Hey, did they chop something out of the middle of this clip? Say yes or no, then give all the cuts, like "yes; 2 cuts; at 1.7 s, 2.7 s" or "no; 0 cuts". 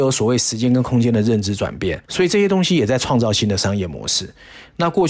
yes; 1 cut; at 2.0 s